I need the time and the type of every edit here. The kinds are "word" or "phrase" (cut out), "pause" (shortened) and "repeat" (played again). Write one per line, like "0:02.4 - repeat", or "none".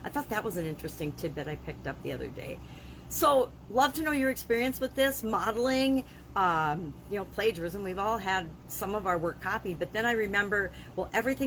0:07.1 - word